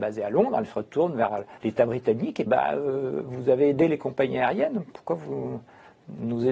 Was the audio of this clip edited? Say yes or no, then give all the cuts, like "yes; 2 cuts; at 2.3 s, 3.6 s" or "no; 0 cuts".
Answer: yes; 2 cuts; at 1.6 s, 2.5 s